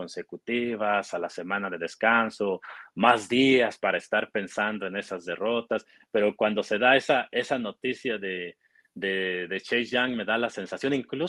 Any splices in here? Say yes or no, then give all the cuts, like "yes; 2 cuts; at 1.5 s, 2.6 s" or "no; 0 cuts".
no; 0 cuts